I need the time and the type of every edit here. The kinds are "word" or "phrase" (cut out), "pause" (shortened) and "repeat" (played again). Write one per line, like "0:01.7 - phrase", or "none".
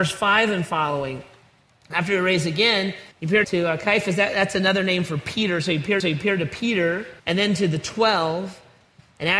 0:03.1 - pause
0:03.4 - word
0:06.0 - repeat
0:07.2 - pause